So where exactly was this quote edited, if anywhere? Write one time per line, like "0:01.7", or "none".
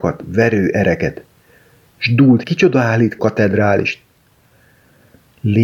0:02.4
0:03.2